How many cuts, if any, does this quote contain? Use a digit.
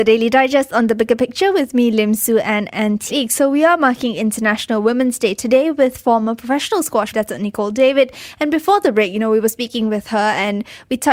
2